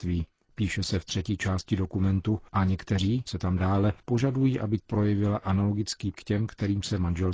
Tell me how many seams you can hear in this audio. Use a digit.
5